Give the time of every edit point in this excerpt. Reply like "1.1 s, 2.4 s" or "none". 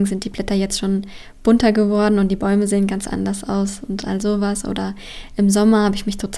none